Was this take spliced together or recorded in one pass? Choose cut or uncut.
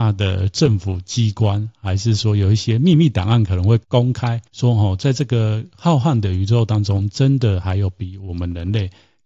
cut